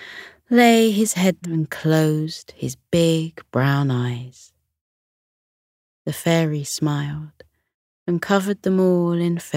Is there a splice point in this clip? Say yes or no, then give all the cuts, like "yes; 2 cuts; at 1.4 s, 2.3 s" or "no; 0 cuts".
yes; 1 cut; at 1.4 s